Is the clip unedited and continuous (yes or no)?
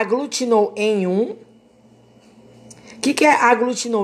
yes